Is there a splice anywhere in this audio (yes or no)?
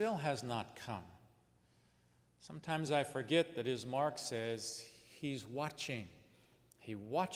no